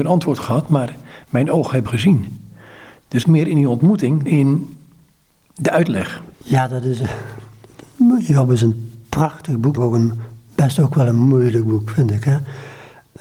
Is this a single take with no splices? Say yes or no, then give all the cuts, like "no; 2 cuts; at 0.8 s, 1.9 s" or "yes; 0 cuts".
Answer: no; 5 cuts; at 1.9 s, 3.2 s, 4.3 s, 6.3 s, 9.8 s